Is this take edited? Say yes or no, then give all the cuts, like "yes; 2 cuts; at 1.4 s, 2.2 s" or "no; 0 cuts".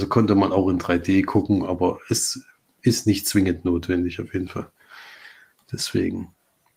no; 0 cuts